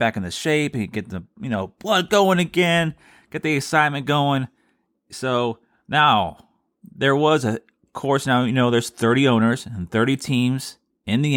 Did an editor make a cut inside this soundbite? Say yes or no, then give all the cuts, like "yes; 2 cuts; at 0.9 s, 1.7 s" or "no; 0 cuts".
no; 0 cuts